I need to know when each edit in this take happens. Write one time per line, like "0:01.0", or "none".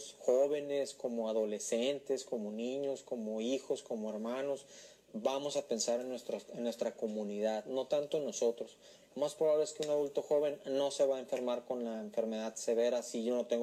none